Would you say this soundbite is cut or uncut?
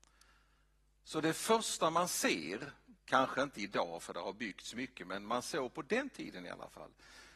cut